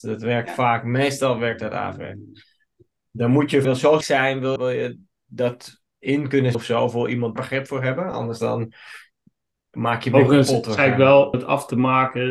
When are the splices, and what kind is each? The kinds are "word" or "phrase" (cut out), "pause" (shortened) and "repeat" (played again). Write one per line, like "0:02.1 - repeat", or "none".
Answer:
0:03.6 - word
0:04.0 - word
0:04.6 - word
0:06.5 - word
0:07.4 - word
0:11.3 - word